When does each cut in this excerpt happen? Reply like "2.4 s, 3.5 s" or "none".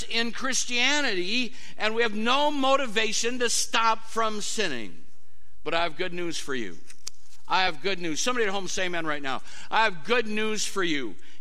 none